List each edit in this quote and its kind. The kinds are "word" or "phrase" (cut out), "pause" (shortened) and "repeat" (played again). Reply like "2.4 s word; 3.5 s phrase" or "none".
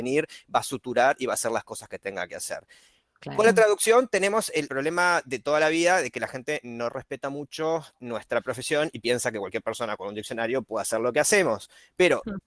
4.7 s word